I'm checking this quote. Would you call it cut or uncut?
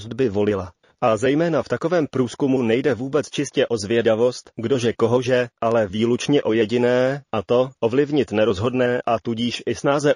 uncut